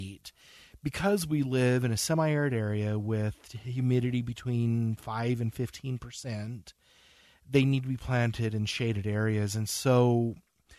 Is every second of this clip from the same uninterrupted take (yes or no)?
yes